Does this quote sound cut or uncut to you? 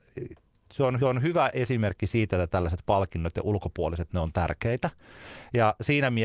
cut